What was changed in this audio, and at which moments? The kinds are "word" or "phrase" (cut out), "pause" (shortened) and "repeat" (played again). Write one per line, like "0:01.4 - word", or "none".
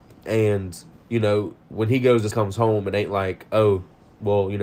0:00.9 - pause
0:01.6 - pause
0:02.3 - phrase